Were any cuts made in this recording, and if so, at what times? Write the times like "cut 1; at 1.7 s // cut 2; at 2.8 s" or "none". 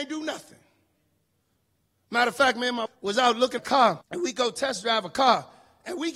cut 1; at 2.9 s // cut 2; at 3.6 s // cut 3; at 4.0 s